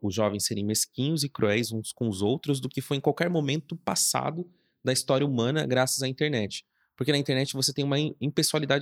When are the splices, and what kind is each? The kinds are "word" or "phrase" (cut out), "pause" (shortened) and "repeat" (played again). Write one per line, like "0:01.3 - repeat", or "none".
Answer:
none